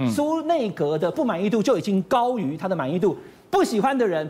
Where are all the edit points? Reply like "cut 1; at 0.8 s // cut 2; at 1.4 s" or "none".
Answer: none